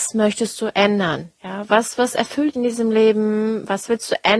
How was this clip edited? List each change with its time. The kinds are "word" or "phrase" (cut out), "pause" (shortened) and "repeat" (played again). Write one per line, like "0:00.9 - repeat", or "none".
0:01.3 - pause
0:02.5 - word